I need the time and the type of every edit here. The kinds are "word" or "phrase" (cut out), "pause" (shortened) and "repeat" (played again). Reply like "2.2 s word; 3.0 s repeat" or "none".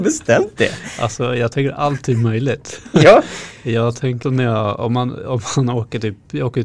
4.2 s word